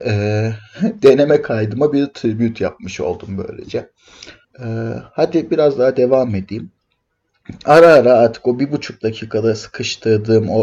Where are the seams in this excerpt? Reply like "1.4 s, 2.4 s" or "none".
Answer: 4.4 s